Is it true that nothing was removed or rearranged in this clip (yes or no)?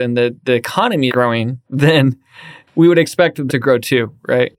no